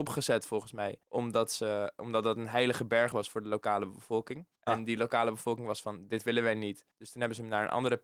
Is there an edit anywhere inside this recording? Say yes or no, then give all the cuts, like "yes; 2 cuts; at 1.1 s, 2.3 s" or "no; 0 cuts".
yes; 3 cuts; at 1.0 s, 4.6 s, 6.9 s